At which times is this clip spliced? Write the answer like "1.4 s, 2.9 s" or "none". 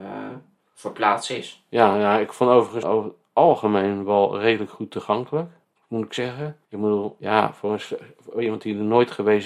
2.8 s, 5.7 s, 6.6 s